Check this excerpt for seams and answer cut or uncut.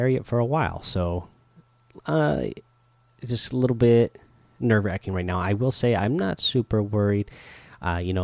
uncut